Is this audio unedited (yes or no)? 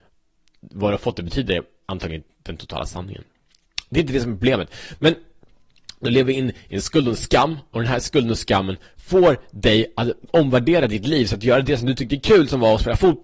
yes